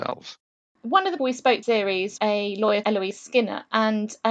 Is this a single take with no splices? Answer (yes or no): no